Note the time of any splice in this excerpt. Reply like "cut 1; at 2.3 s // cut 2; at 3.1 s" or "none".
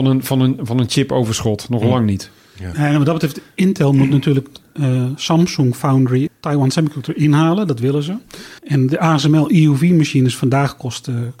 cut 1; at 6.3 s // cut 2; at 8.6 s